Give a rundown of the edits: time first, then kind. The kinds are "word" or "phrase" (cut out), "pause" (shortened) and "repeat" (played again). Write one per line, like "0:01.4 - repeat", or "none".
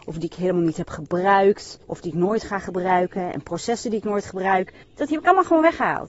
0:01.8 - pause
0:04.8 - pause